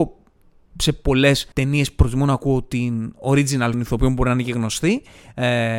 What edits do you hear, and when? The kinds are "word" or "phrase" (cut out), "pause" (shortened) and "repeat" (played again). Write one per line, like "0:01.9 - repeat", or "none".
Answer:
0:01.5 - pause
0:03.7 - phrase